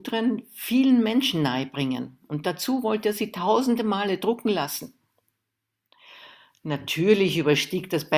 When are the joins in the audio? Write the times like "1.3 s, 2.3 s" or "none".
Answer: none